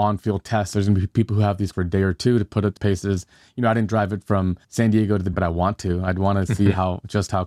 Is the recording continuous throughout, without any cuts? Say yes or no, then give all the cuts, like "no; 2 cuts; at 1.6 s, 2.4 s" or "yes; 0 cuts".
no; 4 cuts; at 1.7 s, 2.8 s, 4.6 s, 5.3 s